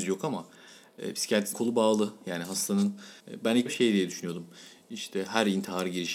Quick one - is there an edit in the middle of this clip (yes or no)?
yes